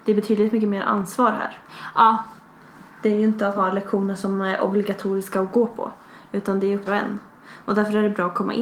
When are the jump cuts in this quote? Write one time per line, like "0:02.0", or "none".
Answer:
0:03.6
0:06.9